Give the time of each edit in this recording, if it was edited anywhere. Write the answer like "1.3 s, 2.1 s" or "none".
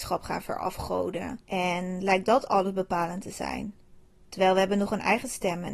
1.4 s, 4.0 s